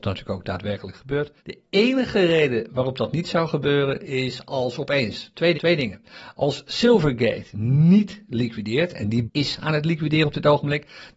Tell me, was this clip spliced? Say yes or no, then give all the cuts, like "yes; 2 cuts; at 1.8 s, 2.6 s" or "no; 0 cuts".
yes; 3 cuts; at 1.4 s, 5.5 s, 9.3 s